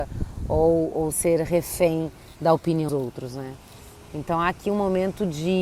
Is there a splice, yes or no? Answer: yes